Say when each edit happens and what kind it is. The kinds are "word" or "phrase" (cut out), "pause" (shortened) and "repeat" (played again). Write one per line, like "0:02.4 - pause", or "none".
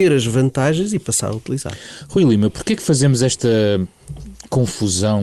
none